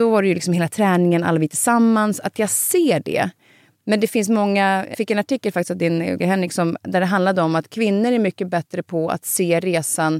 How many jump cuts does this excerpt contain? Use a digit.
2